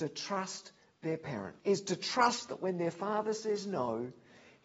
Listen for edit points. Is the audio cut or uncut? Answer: cut